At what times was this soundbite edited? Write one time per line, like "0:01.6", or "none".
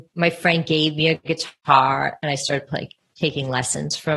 none